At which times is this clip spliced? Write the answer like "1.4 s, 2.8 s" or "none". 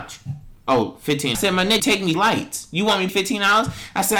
1.3 s, 1.8 s, 2.1 s, 3.1 s